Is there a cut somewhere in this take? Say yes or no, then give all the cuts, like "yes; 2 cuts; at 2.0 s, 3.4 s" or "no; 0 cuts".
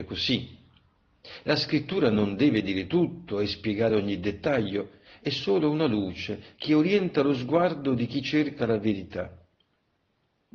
no; 0 cuts